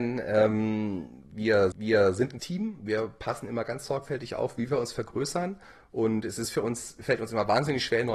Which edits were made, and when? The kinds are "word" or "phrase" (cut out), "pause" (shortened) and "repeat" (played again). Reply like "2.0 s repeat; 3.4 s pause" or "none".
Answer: 1.7 s repeat; 2.4 s word